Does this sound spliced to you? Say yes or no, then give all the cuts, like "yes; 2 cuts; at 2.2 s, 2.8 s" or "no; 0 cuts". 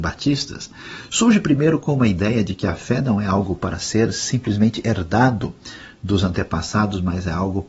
no; 0 cuts